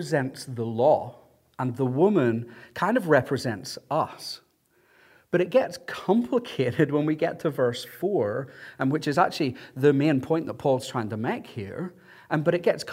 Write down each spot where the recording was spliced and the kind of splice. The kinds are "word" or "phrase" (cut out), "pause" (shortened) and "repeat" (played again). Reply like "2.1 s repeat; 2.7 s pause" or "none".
none